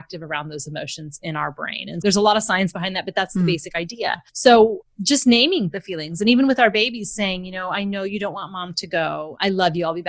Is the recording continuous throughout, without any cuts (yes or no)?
no